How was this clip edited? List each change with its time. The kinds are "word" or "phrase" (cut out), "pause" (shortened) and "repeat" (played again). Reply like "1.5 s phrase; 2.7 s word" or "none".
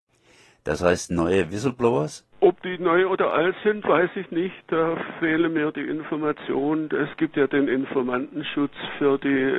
2.3 s pause